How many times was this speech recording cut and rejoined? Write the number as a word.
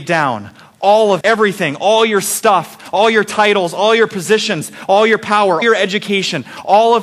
two